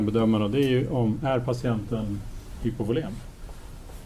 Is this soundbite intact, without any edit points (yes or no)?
yes